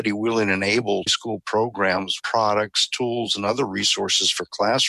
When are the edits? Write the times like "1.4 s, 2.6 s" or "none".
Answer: 1.1 s, 2.2 s